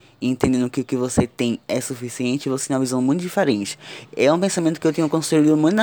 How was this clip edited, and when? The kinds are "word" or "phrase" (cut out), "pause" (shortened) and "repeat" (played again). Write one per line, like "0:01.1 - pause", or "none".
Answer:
none